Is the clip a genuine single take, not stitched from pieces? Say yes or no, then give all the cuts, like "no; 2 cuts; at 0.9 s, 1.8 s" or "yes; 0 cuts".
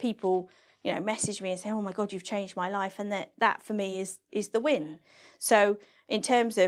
yes; 0 cuts